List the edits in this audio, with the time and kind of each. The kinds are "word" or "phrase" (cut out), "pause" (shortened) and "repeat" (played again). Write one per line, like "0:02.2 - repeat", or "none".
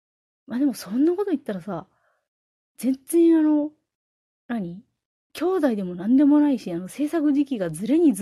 none